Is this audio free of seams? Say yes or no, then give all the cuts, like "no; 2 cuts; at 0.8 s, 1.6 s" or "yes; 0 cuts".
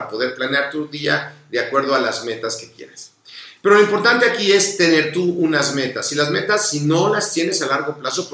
yes; 0 cuts